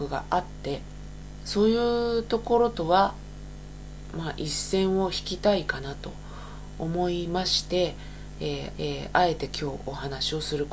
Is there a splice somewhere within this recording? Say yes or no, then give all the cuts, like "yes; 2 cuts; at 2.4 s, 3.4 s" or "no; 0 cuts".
yes; 1 cut; at 8.7 s